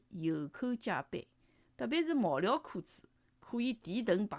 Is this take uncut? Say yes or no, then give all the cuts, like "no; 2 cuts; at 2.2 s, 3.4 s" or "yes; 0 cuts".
yes; 0 cuts